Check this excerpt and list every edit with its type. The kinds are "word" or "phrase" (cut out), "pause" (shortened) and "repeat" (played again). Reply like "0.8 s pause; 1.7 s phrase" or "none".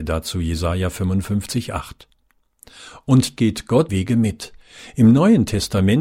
3.4 s word; 3.9 s word